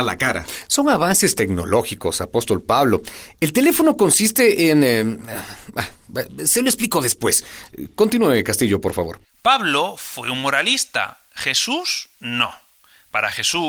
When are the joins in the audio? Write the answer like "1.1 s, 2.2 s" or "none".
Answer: none